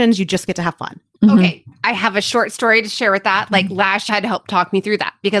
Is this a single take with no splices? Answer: no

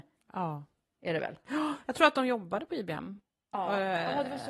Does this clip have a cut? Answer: no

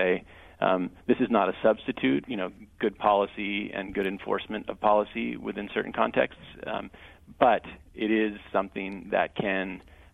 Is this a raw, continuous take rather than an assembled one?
no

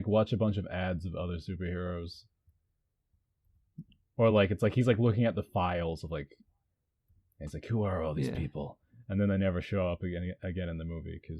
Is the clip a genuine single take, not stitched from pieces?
yes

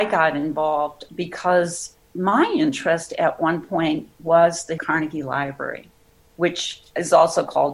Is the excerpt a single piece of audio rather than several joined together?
no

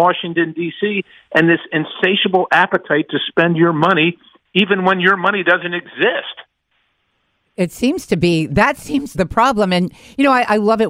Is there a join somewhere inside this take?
yes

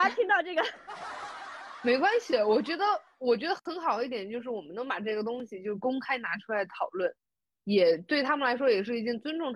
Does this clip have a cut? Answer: no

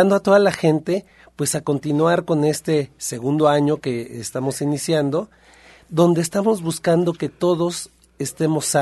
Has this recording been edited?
no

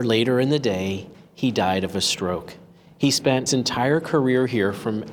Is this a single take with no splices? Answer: no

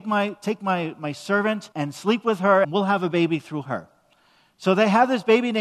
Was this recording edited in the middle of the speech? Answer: yes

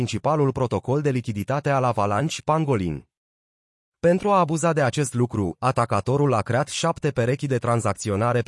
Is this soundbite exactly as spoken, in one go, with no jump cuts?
yes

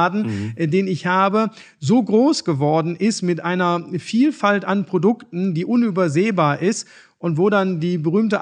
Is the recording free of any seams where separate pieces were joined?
yes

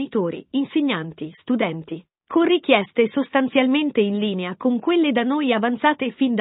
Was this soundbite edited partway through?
no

